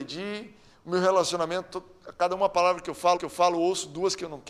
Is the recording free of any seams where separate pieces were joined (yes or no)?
no